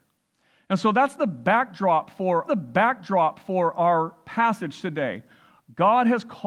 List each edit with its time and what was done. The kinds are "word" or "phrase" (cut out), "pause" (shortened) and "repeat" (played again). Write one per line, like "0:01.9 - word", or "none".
0:02.4 - repeat